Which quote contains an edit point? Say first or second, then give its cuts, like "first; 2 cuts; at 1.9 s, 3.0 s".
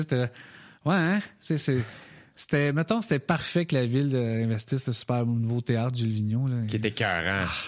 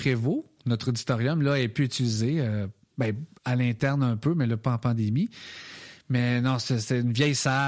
second; 1 cut; at 3.3 s